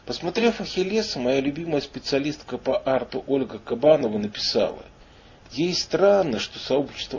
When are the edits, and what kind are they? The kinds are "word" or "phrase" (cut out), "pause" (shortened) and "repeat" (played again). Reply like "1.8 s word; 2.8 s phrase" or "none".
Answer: none